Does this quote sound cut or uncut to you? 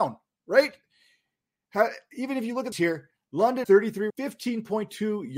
cut